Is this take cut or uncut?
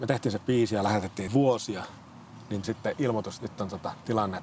cut